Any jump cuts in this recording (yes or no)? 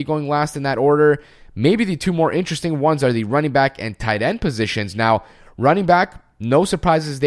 no